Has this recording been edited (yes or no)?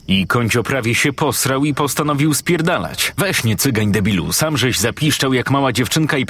no